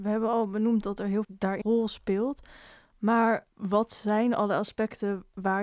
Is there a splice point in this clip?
yes; 3 cuts; at 1.2 s, 1.6 s, 3.5 s

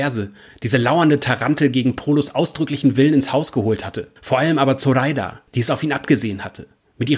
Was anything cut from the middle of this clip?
yes; 2 cuts; at 4.2 s, 5.5 s

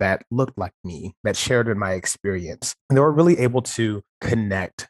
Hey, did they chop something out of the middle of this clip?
no; 0 cuts

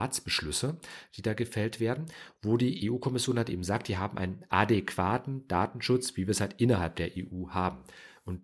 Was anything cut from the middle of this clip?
no; 0 cuts

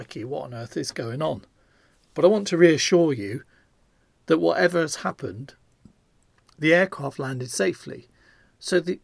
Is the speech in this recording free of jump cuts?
yes; 0 cuts

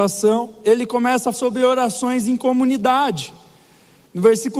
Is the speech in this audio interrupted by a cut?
yes; 1 cut; at 1.3 s

